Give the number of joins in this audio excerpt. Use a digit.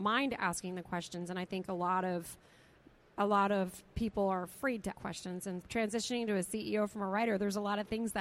2